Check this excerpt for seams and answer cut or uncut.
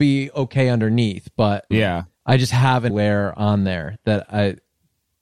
cut